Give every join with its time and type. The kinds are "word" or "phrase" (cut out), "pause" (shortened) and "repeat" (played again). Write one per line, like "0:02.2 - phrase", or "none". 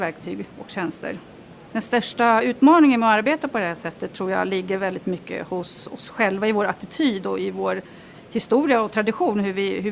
none